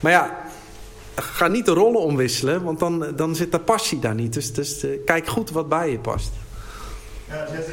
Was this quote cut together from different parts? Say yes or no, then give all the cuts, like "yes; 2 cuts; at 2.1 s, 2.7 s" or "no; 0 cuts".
no; 0 cuts